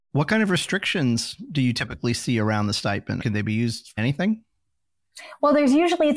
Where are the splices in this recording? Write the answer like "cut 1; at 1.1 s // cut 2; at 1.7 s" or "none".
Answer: cut 1; at 3.2 s // cut 2; at 4.0 s